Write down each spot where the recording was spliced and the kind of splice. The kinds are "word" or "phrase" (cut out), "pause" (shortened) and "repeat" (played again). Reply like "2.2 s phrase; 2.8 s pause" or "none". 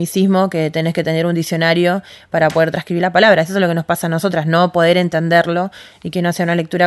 none